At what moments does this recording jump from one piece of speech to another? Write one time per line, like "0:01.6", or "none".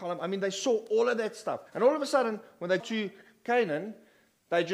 0:01.7
0:02.8